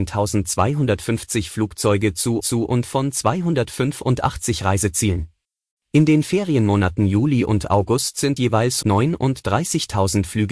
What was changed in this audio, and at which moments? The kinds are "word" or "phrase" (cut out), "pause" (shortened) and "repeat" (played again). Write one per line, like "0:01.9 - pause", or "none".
0:02.4 - repeat
0:05.4 - pause
0:08.4 - word
0:08.8 - word